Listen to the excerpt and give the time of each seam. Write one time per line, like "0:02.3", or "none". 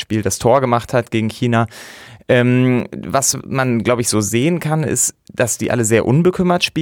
none